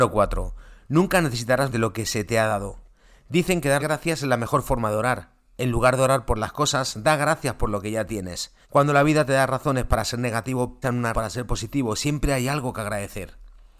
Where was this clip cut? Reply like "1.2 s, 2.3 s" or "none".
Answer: 1.7 s, 3.8 s, 8.6 s, 10.8 s, 11.1 s